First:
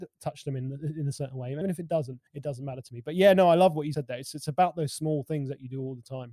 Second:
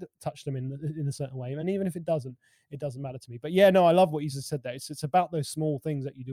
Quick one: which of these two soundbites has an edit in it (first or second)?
first